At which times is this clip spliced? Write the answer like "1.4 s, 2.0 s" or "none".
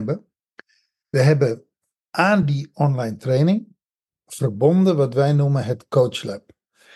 none